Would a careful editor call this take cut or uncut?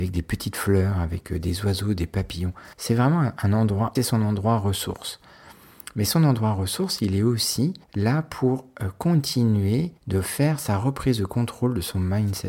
cut